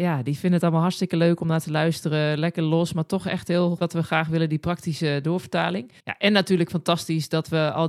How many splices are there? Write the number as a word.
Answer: two